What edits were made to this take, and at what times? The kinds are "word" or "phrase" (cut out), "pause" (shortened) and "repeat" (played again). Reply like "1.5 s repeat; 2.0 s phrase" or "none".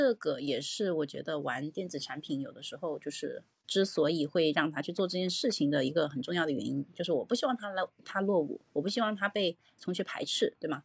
3.6 s word; 8.7 s pause